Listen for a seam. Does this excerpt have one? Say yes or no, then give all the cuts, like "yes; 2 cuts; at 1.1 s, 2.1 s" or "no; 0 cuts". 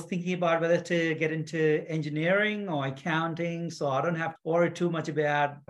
yes; 1 cut; at 4.4 s